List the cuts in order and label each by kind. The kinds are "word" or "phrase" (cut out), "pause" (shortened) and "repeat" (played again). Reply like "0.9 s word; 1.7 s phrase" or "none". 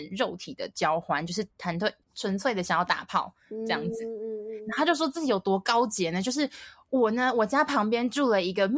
1.5 s pause; 2.0 s pause